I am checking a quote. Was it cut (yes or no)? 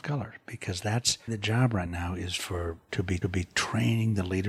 yes